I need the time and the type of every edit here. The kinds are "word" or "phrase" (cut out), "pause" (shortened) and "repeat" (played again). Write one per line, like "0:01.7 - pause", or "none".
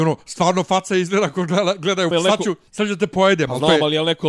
0:02.1 - phrase
0:02.7 - pause